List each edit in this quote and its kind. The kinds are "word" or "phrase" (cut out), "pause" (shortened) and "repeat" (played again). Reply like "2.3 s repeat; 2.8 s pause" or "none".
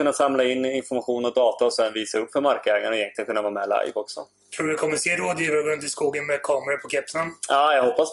none

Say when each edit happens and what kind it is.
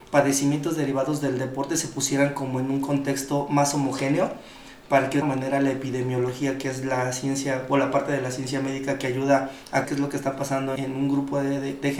5.2 s phrase; 9.8 s word; 10.8 s word

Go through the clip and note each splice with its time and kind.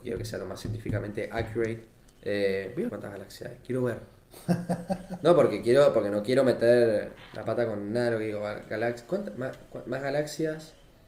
2.9 s word

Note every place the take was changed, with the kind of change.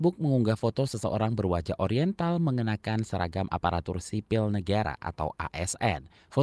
none

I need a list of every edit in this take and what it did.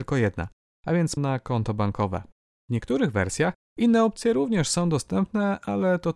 1.2 s phrase

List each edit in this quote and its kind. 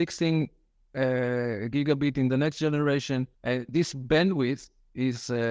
3.3 s pause

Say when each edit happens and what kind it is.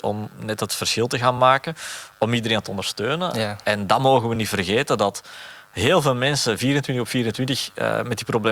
none

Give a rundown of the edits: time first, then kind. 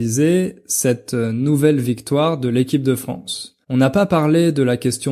3.6 s pause

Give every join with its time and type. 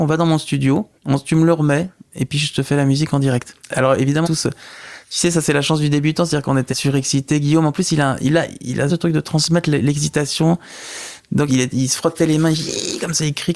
1.0 s pause; 3.6 s pause; 4.2 s phrase; 6.7 s word; 8.9 s word; 11.5 s word

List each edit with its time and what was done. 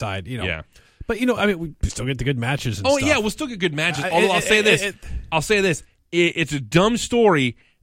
none

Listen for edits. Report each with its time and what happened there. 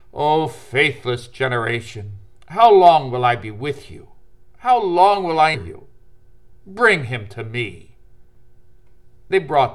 5.5 s word

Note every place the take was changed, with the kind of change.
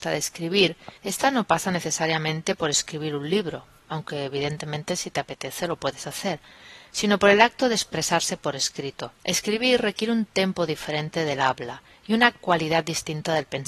1.0 s pause; 9.2 s pause

